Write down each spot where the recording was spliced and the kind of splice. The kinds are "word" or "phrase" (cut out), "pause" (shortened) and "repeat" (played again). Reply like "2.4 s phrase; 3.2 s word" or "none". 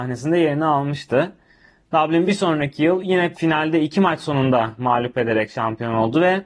3.3 s word